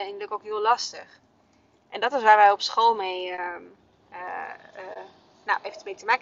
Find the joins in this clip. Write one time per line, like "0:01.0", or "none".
none